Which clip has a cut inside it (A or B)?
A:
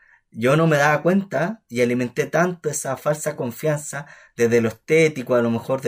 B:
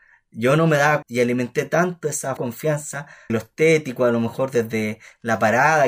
B